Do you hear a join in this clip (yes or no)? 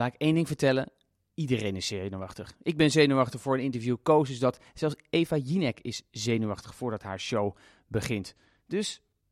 no